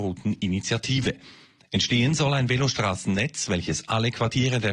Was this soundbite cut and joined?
no; 0 cuts

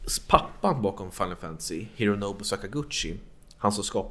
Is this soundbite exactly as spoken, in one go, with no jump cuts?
yes; 0 cuts

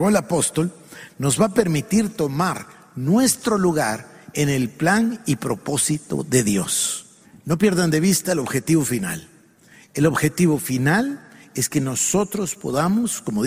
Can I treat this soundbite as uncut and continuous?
no; 1 cut; at 7.2 s

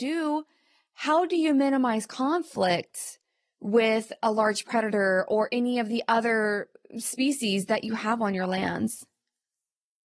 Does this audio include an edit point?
no; 0 cuts

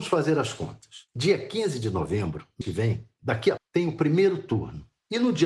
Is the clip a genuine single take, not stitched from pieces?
no; 2 cuts; at 2.6 s, 3.6 s

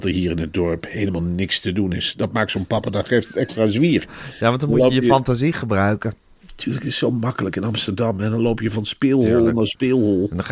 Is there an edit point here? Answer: no; 0 cuts

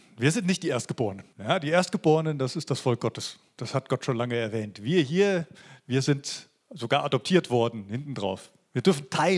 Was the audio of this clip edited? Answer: yes; 1 cut; at 1.3 s

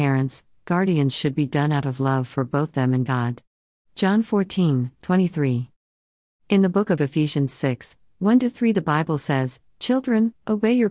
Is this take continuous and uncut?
yes; 0 cuts

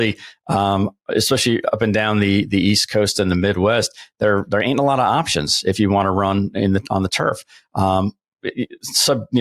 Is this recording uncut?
yes; 0 cuts

